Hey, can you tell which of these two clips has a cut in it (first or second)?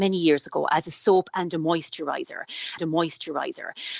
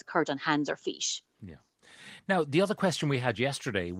first